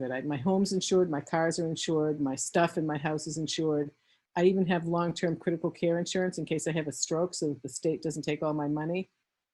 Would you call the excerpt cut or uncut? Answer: uncut